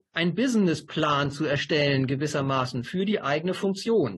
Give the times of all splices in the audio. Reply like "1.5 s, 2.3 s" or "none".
none